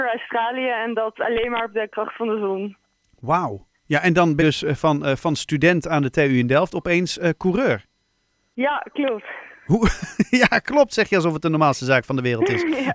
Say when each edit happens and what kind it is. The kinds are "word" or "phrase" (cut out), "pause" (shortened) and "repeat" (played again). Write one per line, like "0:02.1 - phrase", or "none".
0:03.8 - pause
0:04.4 - word